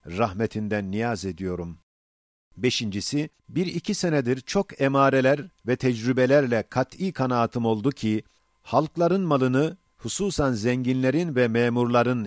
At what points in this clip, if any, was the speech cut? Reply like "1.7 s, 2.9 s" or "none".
3.4 s, 8.4 s